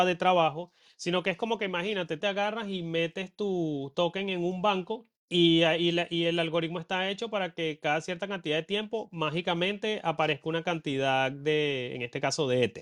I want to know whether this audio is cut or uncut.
cut